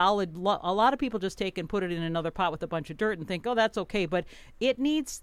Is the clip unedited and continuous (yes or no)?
yes